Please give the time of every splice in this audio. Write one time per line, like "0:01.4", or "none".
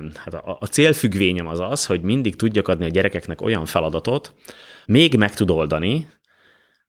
0:04.8